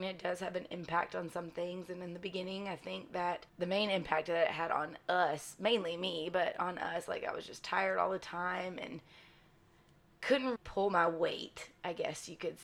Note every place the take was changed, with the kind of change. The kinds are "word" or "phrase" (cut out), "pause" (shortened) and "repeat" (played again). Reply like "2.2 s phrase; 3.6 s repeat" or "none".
3.5 s pause; 10.6 s word